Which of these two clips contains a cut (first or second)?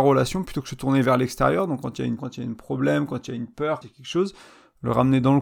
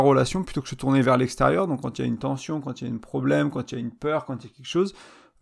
first